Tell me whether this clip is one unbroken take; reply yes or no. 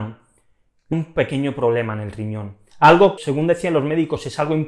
no